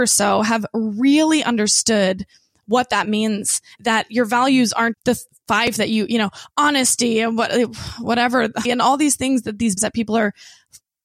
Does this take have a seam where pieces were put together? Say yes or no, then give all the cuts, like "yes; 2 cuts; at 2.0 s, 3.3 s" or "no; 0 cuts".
yes; 5 cuts; at 3.8 s, 4.9 s, 5.8 s, 8.6 s, 9.8 s